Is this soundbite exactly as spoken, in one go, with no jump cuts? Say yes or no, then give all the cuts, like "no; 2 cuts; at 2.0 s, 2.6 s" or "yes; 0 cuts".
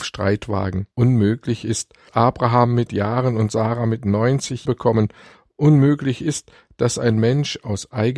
no; 4 cuts; at 0.9 s, 2.1 s, 2.9 s, 4.6 s